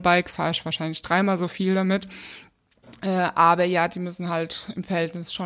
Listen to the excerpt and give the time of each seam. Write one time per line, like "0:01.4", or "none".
none